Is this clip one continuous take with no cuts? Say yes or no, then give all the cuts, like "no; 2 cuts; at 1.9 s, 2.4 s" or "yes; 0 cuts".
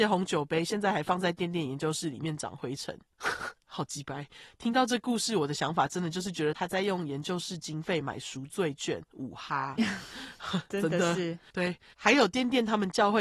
no; 1 cut; at 9.1 s